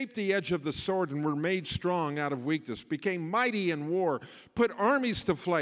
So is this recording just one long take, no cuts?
yes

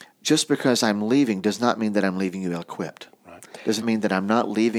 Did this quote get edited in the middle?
yes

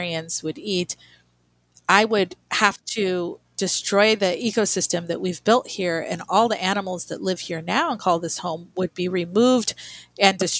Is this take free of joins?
yes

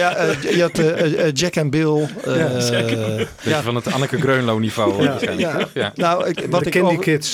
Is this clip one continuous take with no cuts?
yes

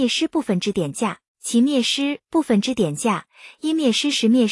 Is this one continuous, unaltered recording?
no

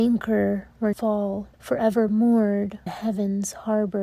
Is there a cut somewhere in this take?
yes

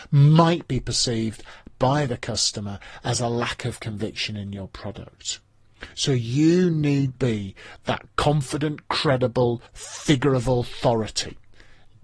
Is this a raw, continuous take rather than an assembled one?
no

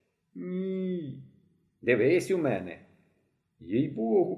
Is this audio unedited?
yes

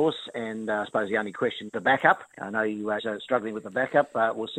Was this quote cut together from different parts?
yes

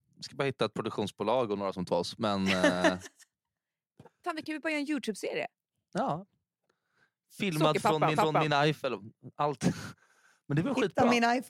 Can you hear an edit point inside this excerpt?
yes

